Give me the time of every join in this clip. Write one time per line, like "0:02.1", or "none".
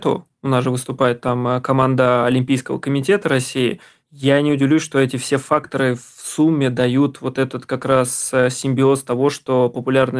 none